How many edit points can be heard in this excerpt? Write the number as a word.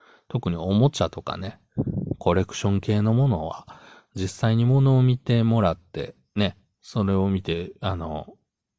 zero